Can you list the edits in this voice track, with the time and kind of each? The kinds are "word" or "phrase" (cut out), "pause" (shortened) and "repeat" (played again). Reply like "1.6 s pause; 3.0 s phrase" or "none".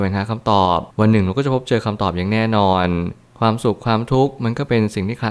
0.9 s pause